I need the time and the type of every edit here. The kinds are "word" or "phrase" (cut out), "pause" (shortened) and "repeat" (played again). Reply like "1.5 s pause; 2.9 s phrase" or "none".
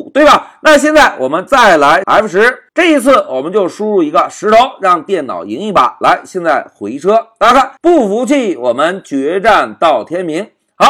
2.0 s word; 2.7 s pause; 7.8 s pause